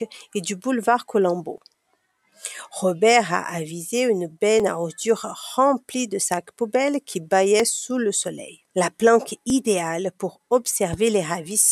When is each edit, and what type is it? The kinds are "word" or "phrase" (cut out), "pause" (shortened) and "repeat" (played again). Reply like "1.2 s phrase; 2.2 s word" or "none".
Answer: 8.7 s pause